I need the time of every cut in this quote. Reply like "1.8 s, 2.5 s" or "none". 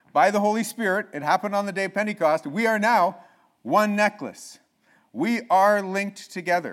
none